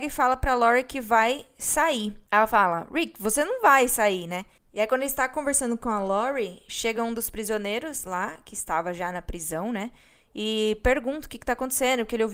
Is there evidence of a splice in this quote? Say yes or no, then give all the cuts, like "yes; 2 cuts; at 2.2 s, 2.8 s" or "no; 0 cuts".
no; 0 cuts